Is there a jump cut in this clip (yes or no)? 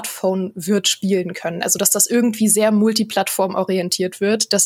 no